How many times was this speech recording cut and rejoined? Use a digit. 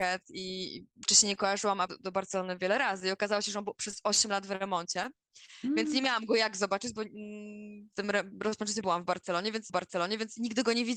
5